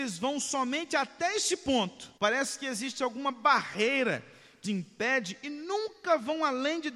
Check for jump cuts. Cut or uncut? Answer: cut